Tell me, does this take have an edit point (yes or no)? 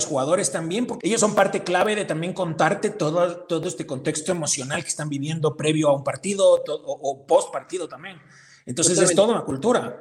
yes